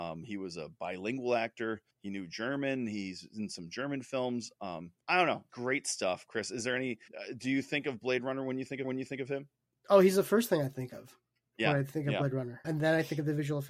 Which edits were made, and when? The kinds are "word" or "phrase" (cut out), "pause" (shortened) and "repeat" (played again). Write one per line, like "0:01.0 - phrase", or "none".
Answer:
0:01.9 - pause
0:05.0 - pause
0:05.5 - word
0:07.1 - pause
0:08.8 - repeat
0:12.6 - word

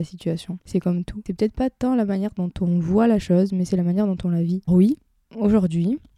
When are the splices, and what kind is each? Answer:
0:04.7 - word

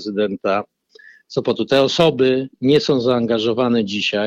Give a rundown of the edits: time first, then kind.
none

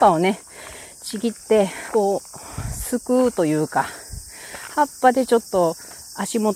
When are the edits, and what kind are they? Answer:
0:01.9 - phrase

